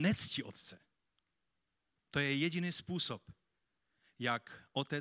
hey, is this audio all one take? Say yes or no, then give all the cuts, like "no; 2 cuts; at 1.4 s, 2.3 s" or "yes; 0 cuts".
yes; 0 cuts